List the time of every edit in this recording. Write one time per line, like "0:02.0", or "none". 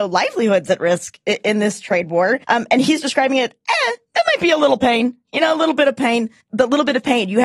0:02.4
0:06.4